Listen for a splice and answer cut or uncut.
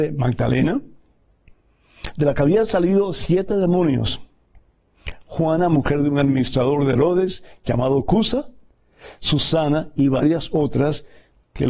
uncut